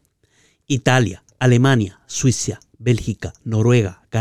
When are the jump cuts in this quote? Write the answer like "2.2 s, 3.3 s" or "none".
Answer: none